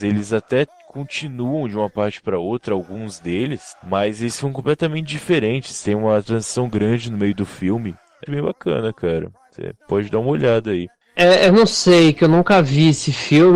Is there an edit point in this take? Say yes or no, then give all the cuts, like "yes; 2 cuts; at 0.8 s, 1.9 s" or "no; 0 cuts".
yes; 1 cut; at 8.3 s